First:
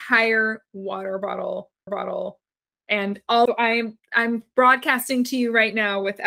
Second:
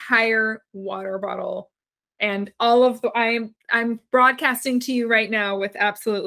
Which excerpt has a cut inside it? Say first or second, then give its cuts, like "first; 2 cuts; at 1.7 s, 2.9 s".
first; 2 cuts; at 1.9 s, 3.5 s